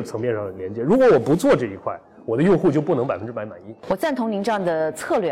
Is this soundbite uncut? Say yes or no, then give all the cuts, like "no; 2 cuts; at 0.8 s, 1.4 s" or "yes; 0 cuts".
yes; 0 cuts